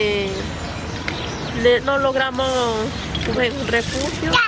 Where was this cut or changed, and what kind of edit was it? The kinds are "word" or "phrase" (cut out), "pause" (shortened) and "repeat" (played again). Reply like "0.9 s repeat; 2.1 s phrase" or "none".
1.8 s word; 3.4 s word